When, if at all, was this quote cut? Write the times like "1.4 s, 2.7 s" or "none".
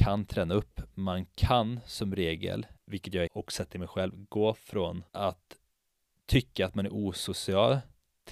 2.8 s, 3.3 s, 5.1 s